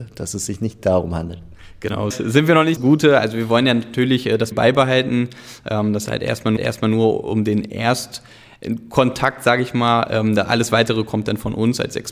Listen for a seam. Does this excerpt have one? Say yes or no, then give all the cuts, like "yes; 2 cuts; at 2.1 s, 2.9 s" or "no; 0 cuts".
yes; 5 cuts; at 2.1 s, 2.8 s, 4.5 s, 6.1 s, 6.6 s